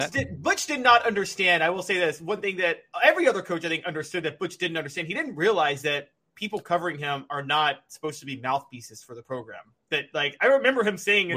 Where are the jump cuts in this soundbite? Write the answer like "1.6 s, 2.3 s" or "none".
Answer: none